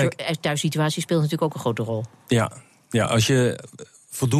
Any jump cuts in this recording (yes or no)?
no